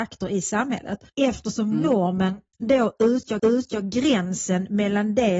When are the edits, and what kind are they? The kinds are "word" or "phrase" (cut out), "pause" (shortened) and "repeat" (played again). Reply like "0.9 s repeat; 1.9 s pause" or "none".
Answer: 1.1 s pause; 2.5 s pause; 3.4 s repeat